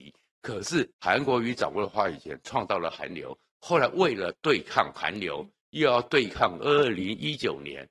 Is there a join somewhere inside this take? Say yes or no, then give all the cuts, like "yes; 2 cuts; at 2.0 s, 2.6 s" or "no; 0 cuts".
yes; 1 cut; at 0.9 s